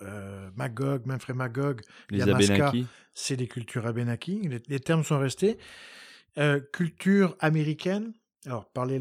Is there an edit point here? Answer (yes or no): no